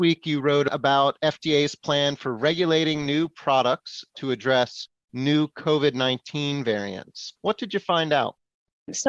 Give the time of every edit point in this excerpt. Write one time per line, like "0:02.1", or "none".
0:07.4